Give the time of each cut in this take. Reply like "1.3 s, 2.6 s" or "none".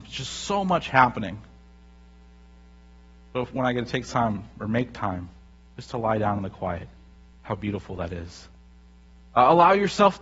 none